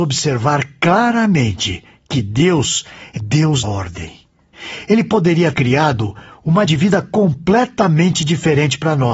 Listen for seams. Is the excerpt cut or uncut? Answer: cut